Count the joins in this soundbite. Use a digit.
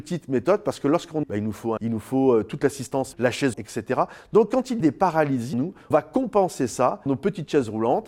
8